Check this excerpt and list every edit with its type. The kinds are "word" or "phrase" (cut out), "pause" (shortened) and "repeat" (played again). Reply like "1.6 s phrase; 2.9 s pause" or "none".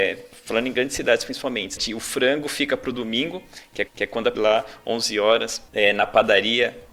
1.8 s word; 3.9 s repeat; 4.3 s phrase; 5.7 s pause